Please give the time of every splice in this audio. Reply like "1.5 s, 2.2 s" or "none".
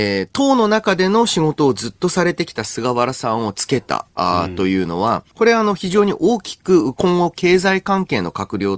5.3 s